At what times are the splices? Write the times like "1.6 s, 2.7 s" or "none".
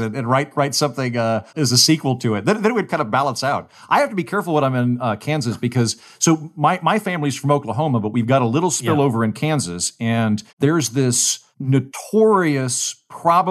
1.5 s, 10.5 s, 11.5 s

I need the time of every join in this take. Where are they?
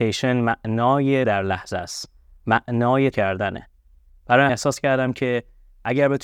1.2 s, 3.1 s, 4.5 s

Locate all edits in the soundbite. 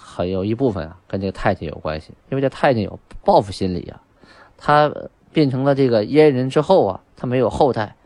2.2 s

